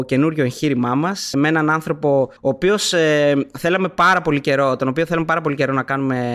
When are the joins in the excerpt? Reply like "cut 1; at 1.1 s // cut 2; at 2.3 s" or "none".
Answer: cut 1; at 1.3 s // cut 2; at 2.4 s